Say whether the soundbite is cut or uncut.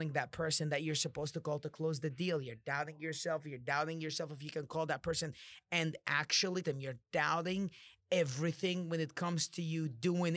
cut